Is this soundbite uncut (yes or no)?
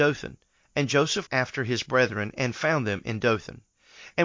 no